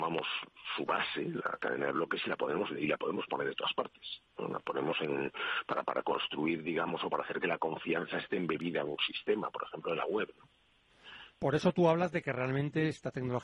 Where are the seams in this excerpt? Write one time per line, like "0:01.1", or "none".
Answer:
0:11.3